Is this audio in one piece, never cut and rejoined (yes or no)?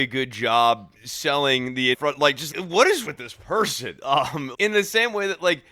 no